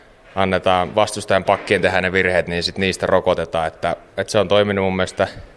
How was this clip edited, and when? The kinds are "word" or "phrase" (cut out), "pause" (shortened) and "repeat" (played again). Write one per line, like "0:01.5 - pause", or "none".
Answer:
none